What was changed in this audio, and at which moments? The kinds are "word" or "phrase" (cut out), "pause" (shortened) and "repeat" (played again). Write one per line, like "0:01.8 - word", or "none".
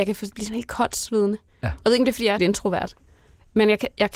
0:02.4 - word